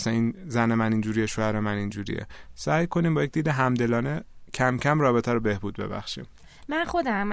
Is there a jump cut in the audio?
no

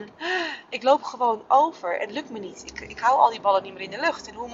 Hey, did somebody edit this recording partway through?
no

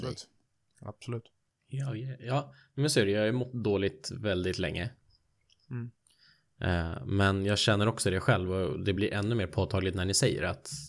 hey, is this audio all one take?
yes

